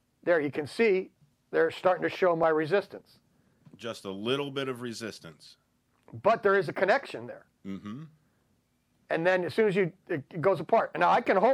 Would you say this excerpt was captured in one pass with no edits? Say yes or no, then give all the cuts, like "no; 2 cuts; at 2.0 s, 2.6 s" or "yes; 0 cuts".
no; 1 cut; at 10.0 s